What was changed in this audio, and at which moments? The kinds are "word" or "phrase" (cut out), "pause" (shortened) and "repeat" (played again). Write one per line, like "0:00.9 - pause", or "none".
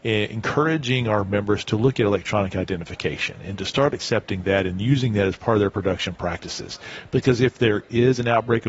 none